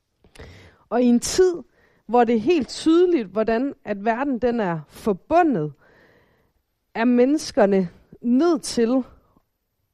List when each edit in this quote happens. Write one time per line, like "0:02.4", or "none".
none